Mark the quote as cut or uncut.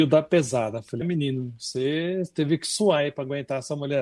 cut